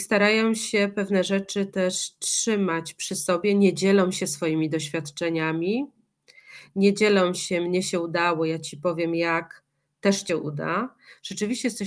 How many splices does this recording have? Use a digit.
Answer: 1